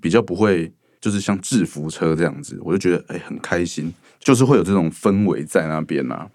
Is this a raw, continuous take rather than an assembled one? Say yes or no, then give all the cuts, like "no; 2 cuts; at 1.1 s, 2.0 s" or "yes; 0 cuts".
no; 1 cut; at 4.0 s